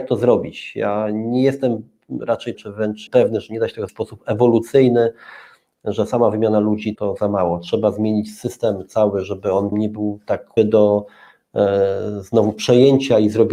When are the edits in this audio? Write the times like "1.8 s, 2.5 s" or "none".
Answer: 2.5 s, 3.1 s, 3.9 s, 7.0 s, 9.7 s, 10.6 s